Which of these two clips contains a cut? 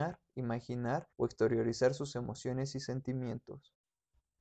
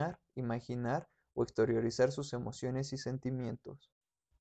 first; 1 cut; at 1.1 s

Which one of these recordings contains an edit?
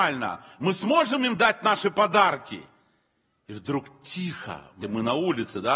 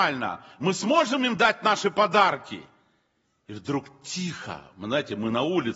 first; 1 cut; at 4.8 s

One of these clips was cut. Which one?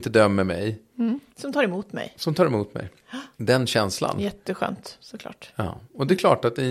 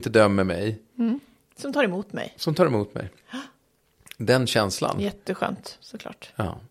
first; 2 cuts; at 1.3 s, 3.3 s

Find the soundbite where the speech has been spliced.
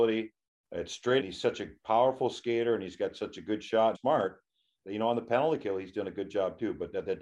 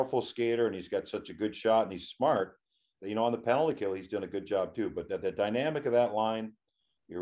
first; 2 cuts; at 1.2 s, 3.9 s

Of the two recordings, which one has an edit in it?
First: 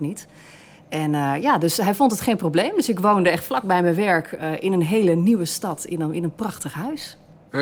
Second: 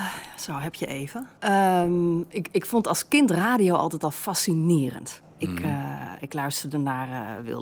second; 1 cut; at 1.4 s

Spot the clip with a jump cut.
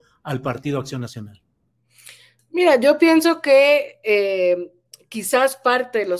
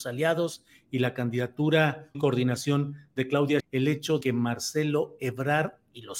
second; 3 cuts; at 2.1 s, 3.6 s, 4.2 s

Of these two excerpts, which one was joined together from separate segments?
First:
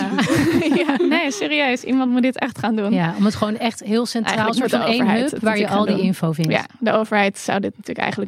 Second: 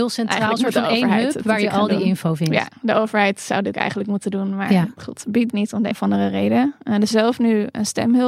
second; 4 cuts; at 3.7 s, 5.5 s, 5.9 s, 7.1 s

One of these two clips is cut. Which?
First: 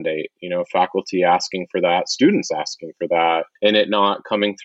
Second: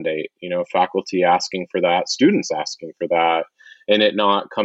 first; 1 cut; at 3.6 s

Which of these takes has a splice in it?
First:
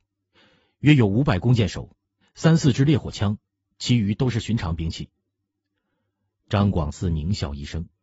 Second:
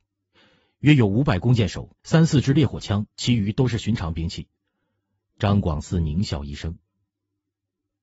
second; 3 cuts; at 2.0 s, 3.1 s, 4.6 s

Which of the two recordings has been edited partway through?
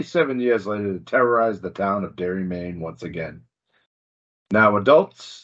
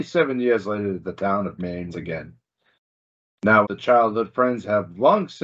second; 4 cuts; at 1.0 s, 1.6 s, 1.9 s, 3.6 s

